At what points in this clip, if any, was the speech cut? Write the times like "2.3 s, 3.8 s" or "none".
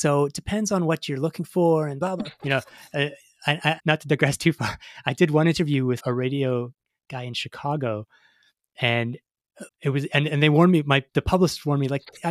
3.8 s, 6.0 s, 9.7 s